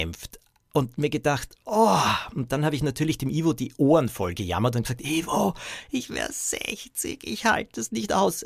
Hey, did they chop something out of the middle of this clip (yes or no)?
no